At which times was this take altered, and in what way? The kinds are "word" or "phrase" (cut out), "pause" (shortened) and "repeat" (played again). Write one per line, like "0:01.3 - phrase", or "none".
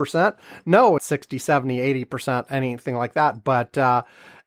0:01.0 - phrase

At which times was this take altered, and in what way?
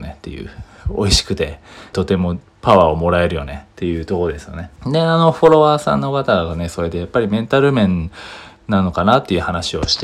0:01.9 - phrase
0:04.8 - pause

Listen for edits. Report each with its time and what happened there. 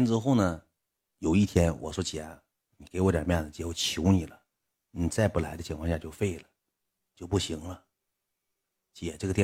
none

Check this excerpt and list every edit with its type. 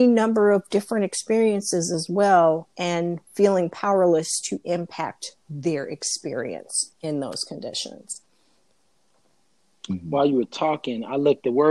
0:03.3 - pause
0:06.9 - pause

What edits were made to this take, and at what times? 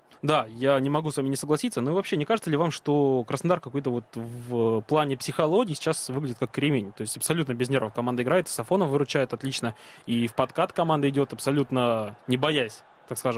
0:12.2 - pause

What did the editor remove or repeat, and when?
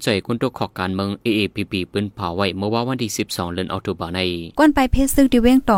0:04.5 - pause

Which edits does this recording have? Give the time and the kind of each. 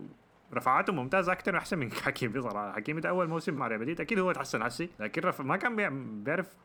0:03.6 - word
0:04.9 - pause

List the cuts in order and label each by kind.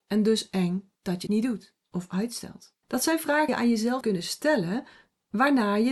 0:01.0 - pause
0:01.3 - word
0:01.8 - pause
0:02.8 - pause
0:03.5 - word
0:04.0 - word

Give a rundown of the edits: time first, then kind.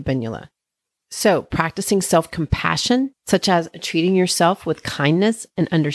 0:03.1 - pause

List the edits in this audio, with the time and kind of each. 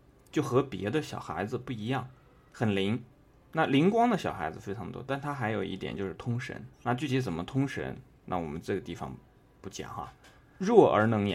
0:06.7 - pause

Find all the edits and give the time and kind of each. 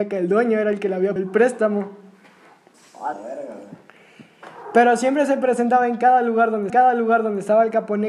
0:01.2 - word
0:03.1 - word
0:06.7 - repeat

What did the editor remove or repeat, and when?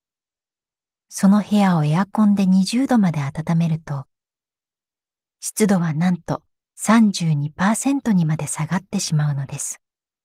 0:06.7 - pause

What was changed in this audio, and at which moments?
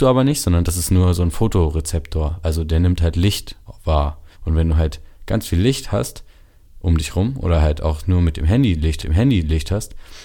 0:04.3 - pause
0:09.0 - repeat

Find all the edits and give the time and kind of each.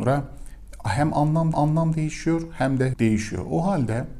0:01.5 - repeat
0:02.9 - word

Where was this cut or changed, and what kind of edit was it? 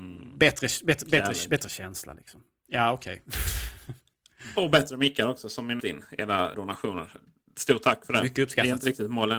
0:05.8 - phrase
0:06.5 - phrase

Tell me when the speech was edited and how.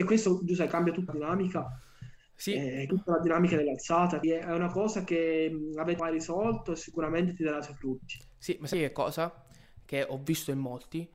0:01.1 - word
0:02.9 - word
0:04.2 - word
0:06.0 - word
0:08.7 - word

